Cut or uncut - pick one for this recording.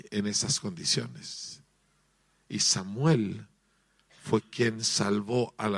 uncut